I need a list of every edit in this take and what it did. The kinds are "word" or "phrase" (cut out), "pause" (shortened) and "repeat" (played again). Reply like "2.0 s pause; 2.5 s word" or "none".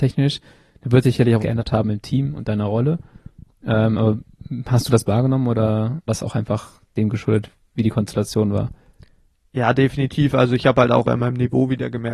1.0 s word; 1.4 s word; 5.1 s word; 6.1 s word; 11.0 s word